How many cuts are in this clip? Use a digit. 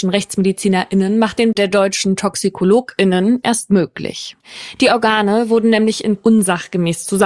2